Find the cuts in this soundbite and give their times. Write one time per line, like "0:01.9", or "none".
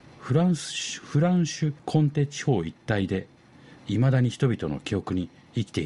0:01.8